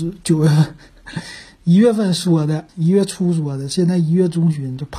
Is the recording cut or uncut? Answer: cut